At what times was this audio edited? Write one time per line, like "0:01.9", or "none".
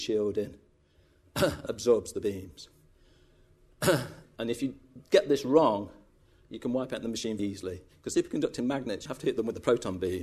0:01.7
0:07.4
0:08.1
0:09.1

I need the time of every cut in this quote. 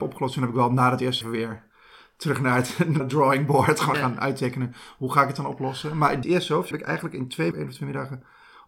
0:01.2
0:03.0
0:03.9
0:06.2
0:06.7
0:07.5

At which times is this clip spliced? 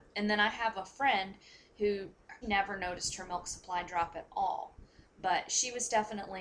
0:02.4

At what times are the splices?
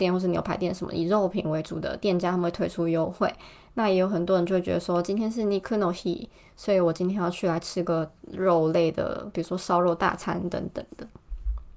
none

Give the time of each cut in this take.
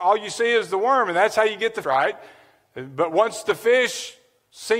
0:01.8

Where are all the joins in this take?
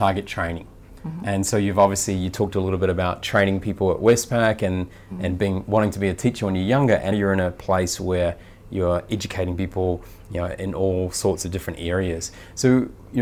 0:07.1

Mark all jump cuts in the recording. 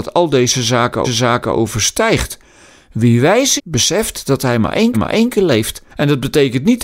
0:01.0
0:03.6
0:04.9
0:05.9

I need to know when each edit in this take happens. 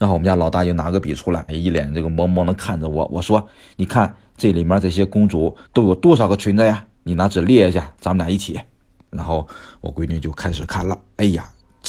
0:01.5
0:03.5
0:05.7

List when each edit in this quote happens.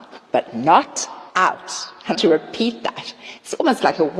0:01.3
0:02.1

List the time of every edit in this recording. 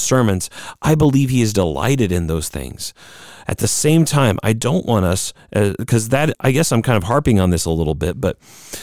0:06.3

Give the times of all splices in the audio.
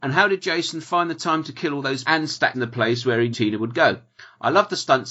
0:02.0
0:02.5
0:03.3

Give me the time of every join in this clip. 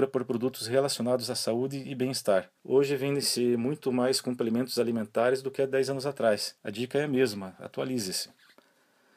0:02.6
0:06.6

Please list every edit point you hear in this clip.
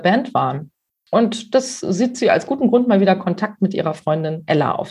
none

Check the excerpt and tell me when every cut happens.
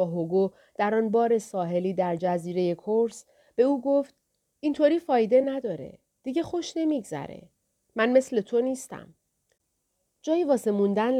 none

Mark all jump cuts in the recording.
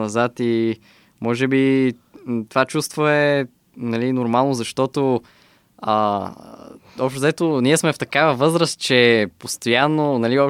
none

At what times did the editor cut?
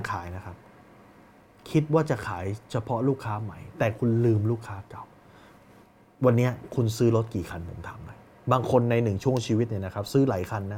none

